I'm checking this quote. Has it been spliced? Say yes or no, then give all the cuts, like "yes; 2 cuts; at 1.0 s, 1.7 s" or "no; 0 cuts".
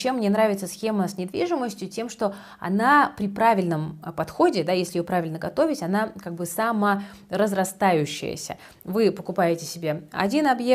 no; 0 cuts